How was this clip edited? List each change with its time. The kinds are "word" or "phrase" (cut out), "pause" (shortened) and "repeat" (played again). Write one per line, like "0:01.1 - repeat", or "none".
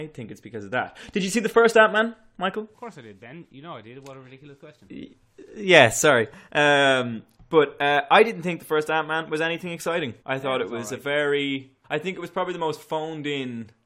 0:02.7 - pause
0:10.2 - pause
0:11.8 - pause